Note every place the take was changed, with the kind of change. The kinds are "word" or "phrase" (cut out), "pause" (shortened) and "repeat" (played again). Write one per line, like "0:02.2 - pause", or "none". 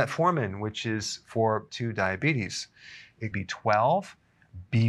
0:01.7 - word
0:03.3 - phrase